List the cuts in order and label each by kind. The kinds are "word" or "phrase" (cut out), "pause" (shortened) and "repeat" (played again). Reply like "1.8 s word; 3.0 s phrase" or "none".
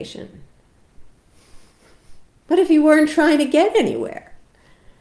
none